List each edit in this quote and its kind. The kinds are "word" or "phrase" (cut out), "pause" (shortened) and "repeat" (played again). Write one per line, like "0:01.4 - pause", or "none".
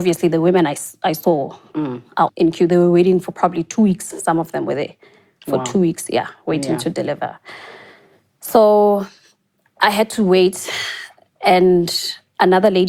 0:02.3 - word